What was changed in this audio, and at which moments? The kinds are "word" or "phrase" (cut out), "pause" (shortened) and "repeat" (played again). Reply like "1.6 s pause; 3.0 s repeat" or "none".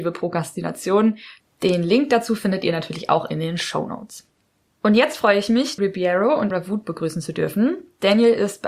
5.8 s word; 6.5 s word